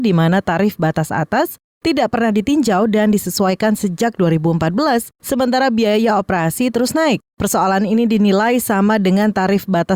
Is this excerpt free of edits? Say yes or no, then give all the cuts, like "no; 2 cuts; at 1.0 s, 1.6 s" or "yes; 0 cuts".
no; 1 cut; at 5.1 s